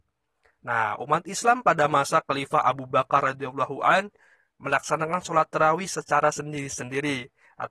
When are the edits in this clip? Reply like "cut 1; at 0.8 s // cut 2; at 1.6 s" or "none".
none